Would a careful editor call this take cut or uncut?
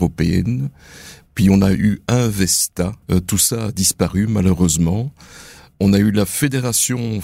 cut